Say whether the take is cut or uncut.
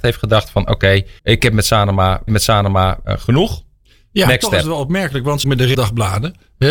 cut